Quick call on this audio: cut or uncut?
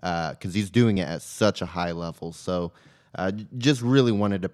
uncut